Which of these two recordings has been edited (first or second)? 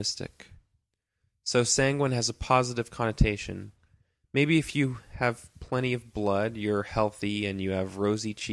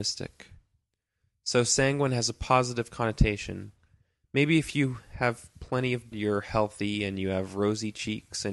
second